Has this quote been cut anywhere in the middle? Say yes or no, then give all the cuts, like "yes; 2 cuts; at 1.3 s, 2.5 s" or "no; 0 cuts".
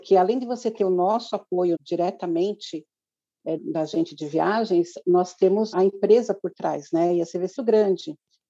yes; 4 cuts; at 1.7 s, 3.6 s, 5.7 s, 7.6 s